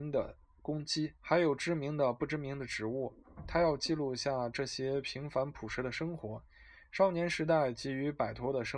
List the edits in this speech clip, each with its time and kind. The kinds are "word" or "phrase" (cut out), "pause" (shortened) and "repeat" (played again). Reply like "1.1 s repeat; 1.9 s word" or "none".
1.2 s pause